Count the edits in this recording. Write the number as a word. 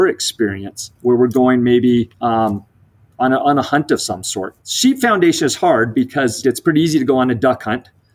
four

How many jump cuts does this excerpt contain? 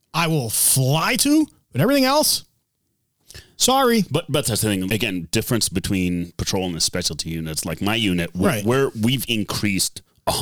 one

